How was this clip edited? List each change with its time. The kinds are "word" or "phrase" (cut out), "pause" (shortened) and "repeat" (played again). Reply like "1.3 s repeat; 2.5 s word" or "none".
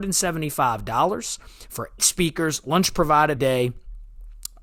2.0 s word; 3.4 s word